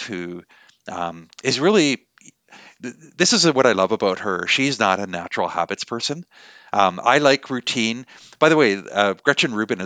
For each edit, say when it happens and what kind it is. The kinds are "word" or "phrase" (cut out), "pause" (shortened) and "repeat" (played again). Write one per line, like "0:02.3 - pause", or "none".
none

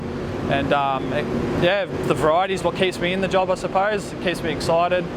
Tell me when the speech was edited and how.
0:02.0 - word

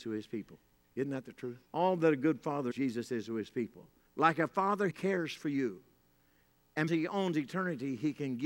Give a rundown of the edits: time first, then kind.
0:01.7 - pause
0:02.7 - word
0:04.1 - pause
0:04.9 - word
0:06.9 - word

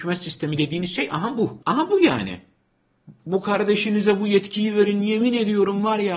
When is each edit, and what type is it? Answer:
0:01.6 - pause

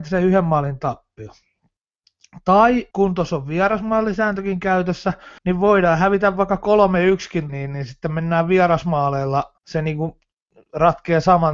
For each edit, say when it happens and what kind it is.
0:02.9 - pause
0:05.4 - pause
0:07.5 - phrase
0:09.6 - pause

